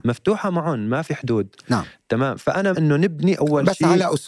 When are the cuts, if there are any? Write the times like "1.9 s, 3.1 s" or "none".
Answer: 2.7 s